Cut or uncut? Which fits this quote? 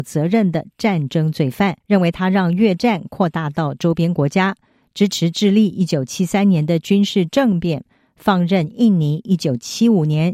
cut